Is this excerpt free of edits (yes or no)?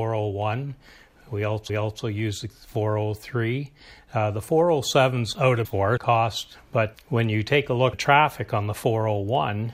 no